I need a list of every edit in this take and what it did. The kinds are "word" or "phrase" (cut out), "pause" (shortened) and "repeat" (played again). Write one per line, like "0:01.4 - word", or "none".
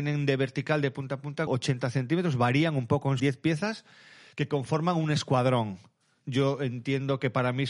0:01.5 - word
0:03.2 - phrase